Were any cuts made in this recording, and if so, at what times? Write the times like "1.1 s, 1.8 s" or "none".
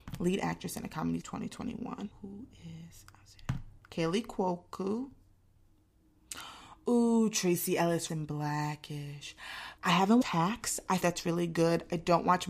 1.2 s, 2.1 s, 3.8 s, 8.1 s, 9.8 s, 10.2 s, 11.0 s

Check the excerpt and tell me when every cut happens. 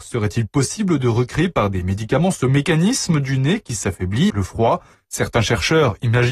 4.3 s, 4.9 s

